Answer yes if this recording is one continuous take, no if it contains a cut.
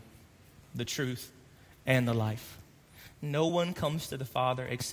yes